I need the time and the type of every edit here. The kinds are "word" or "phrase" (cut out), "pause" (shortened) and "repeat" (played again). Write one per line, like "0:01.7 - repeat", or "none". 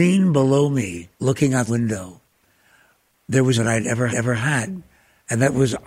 0:01.1 - pause
0:01.7 - phrase
0:03.5 - phrase
0:04.1 - repeat